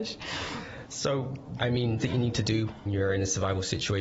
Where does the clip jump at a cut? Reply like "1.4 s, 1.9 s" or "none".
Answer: 1.6 s, 2.0 s, 2.9 s